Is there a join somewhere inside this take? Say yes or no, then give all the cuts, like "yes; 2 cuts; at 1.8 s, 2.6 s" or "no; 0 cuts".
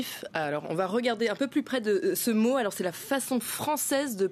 no; 0 cuts